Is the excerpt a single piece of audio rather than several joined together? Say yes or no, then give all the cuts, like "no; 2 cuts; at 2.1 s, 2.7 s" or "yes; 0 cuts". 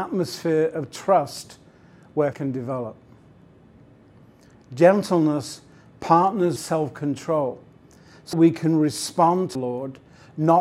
no; 4 cuts; at 2.3 s, 6.6 s, 8.3 s, 9.5 s